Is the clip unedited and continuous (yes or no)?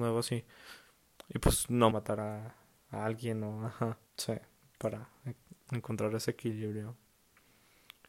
no